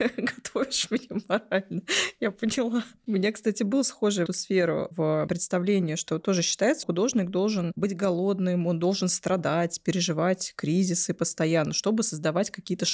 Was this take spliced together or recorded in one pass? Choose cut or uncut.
cut